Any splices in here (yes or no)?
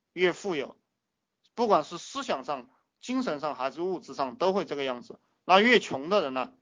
no